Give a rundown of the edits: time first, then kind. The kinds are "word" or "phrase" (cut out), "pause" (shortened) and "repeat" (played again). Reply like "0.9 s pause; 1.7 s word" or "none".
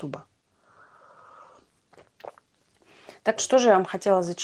3.4 s word